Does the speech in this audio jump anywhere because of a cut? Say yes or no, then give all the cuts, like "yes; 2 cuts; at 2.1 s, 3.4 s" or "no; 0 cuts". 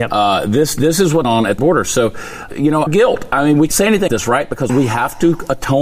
yes; 7 cuts; at 1.2 s, 1.6 s, 2.5 s, 2.9 s, 3.7 s, 4.1 s, 4.7 s